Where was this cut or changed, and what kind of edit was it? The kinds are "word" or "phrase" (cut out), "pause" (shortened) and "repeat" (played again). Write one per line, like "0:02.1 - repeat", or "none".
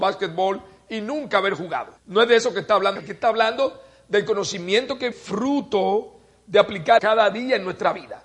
0:02.0 - pause
0:03.0 - word
0:05.1 - word
0:07.0 - word